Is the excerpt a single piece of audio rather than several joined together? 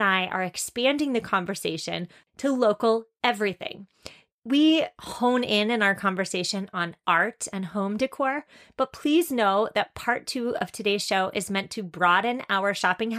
yes; 0 cuts

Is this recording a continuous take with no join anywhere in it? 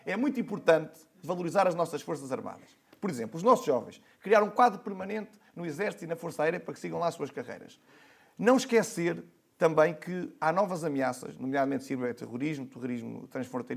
yes; 0 cuts

